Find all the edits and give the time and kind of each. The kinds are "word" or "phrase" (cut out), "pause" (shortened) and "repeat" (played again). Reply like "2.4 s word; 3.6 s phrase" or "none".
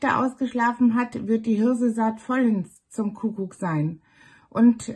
none